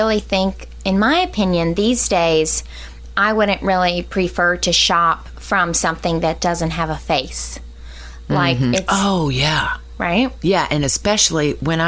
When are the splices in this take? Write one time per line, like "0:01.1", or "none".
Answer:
none